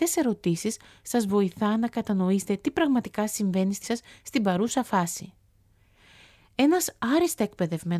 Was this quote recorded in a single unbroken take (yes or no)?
no